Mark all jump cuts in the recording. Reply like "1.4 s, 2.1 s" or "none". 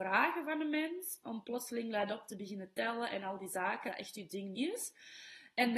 1.2 s, 3.9 s, 4.5 s